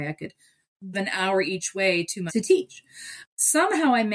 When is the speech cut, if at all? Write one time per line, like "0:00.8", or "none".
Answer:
0:00.9
0:02.3

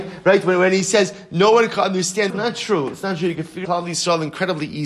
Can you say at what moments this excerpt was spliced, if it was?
0:02.3
0:03.6

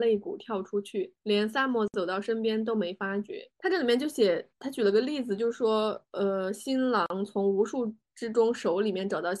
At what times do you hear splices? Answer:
0:01.2
0:04.5

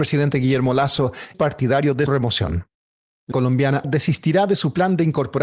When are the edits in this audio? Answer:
0:01.3
0:02.1
0:03.3
0:03.8

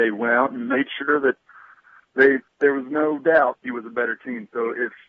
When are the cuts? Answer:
0:03.6

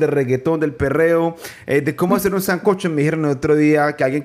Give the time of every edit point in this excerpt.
none

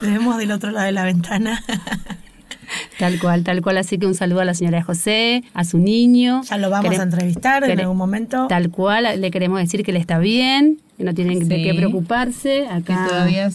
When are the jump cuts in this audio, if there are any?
0:05.5

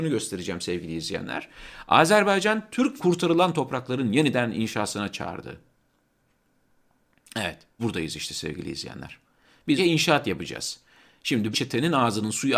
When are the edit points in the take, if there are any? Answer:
0:03.0
0:07.8
0:09.8
0:11.5

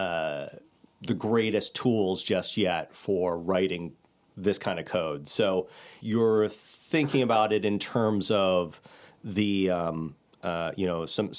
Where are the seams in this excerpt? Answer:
0:06.0

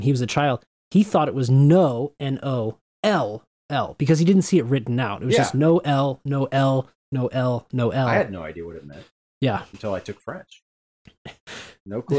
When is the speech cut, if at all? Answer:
none

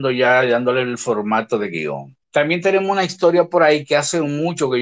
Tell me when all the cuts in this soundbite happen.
0:02.2

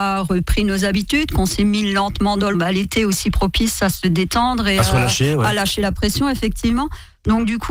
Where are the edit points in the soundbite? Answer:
0:02.5

